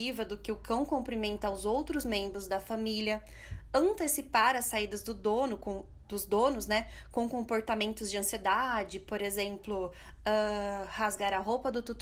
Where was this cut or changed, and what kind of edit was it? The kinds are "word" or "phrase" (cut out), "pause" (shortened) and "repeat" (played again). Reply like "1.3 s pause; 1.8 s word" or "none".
none